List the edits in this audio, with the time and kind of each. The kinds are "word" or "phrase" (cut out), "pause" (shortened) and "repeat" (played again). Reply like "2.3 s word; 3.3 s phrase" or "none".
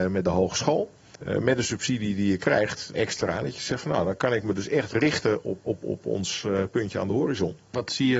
2.9 s word; 5.7 s word